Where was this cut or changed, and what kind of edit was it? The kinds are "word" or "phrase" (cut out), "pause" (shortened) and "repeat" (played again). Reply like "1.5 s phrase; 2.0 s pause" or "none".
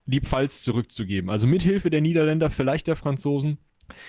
none